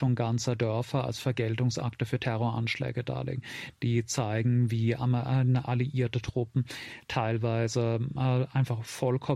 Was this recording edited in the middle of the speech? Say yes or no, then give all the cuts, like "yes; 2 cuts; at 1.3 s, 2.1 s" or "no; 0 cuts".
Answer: no; 0 cuts